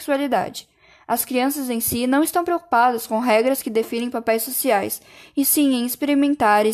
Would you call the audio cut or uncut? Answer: uncut